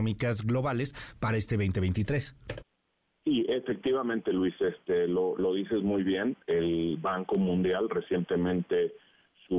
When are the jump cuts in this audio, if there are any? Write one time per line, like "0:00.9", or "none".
none